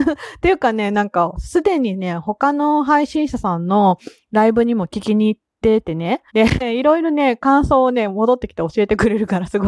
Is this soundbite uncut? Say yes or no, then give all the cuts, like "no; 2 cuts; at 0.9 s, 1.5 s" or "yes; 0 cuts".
no; 1 cut; at 6.3 s